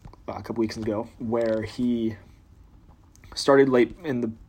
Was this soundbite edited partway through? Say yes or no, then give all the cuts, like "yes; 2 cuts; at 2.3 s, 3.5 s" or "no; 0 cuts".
yes; 1 cut; at 1.1 s